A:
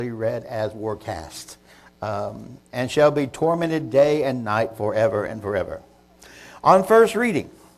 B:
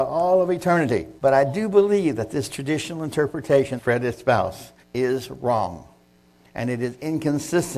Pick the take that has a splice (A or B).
B